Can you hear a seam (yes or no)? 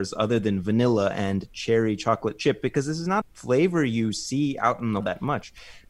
yes